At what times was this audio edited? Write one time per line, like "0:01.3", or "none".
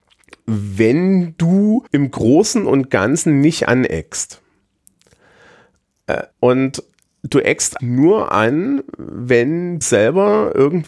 0:01.9
0:06.3
0:07.8
0:09.8